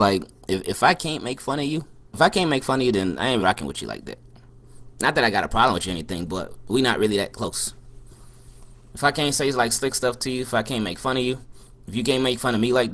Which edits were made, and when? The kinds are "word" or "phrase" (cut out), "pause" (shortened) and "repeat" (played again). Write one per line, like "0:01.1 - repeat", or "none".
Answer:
0:02.1 - word
0:03.4 - word